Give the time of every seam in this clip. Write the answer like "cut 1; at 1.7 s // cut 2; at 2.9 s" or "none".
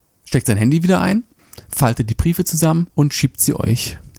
cut 1; at 2.9 s